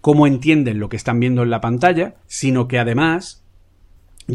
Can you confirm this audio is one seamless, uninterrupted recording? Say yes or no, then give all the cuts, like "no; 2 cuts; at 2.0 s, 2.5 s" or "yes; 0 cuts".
no; 1 cut; at 2.2 s